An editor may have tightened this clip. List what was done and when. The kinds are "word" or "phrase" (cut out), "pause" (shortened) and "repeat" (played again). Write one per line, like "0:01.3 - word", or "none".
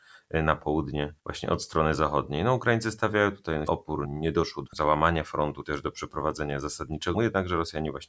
0:01.2 - pause
0:03.7 - word
0:04.0 - word
0:04.7 - word
0:05.6 - phrase
0:07.1 - word